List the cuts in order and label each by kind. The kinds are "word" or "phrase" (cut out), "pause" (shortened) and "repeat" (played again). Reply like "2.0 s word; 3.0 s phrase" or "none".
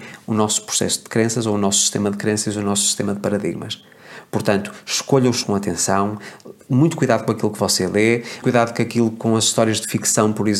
5.4 s word; 8.4 s word